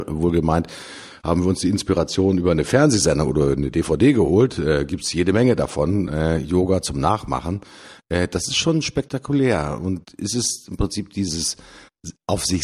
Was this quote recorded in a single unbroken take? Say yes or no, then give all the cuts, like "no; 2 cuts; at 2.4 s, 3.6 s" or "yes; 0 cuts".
yes; 0 cuts